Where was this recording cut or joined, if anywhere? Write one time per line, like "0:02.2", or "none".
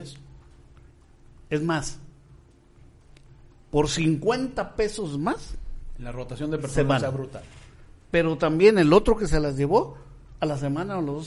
none